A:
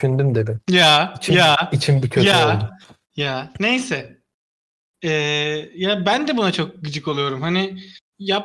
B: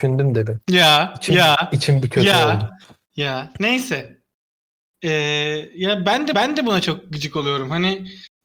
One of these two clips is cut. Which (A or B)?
B